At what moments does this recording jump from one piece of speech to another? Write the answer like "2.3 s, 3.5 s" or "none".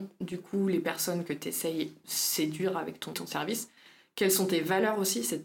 2.0 s, 3.1 s